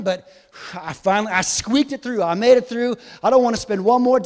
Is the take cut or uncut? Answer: uncut